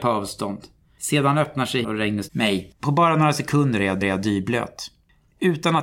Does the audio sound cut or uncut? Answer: cut